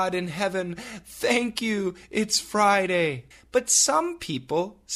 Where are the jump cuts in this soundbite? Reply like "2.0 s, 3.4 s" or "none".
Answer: 3.3 s